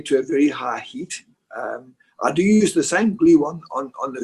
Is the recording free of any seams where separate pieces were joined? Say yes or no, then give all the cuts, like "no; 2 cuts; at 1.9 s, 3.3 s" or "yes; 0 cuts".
yes; 0 cuts